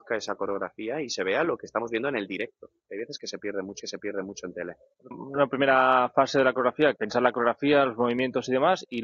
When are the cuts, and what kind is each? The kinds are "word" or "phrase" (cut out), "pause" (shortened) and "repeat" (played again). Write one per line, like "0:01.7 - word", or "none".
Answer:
0:03.8 - repeat
0:05.1 - phrase
0:07.0 - word